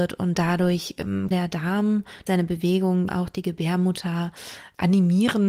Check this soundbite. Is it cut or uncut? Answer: cut